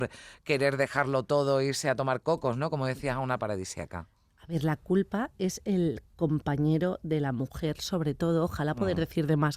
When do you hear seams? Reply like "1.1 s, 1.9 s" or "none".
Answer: 3.4 s